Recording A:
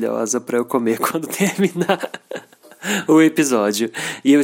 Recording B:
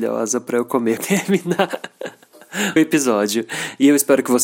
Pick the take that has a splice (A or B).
B